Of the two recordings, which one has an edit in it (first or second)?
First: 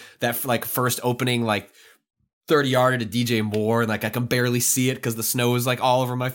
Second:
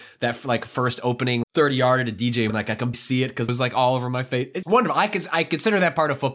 second